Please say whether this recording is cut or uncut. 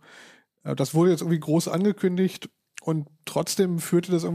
uncut